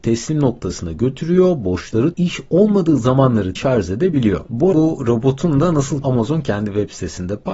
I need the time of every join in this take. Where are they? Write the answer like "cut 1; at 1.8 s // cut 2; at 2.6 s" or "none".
cut 1; at 2.1 s // cut 2; at 3.6 s // cut 3; at 4.7 s // cut 4; at 6.0 s